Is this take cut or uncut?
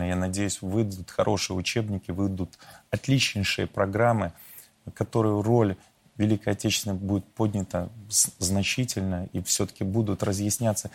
uncut